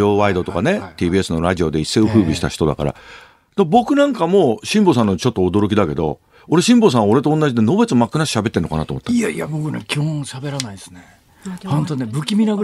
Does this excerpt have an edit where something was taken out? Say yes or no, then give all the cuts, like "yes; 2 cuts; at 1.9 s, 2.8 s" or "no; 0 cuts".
no; 0 cuts